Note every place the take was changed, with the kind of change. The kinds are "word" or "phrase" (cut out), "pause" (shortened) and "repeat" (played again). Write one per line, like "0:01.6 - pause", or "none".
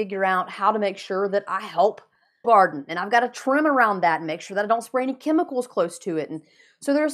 0:02.4 - phrase